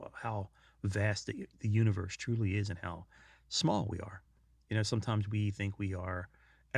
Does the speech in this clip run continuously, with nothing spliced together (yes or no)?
yes